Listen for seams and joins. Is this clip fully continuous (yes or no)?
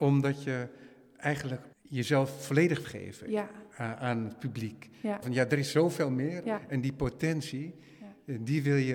no